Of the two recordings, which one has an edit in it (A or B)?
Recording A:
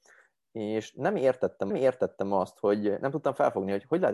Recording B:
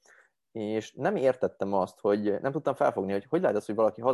A